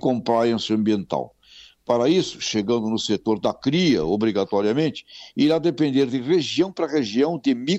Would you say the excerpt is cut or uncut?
uncut